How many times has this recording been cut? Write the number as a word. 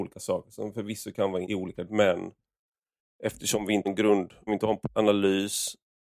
five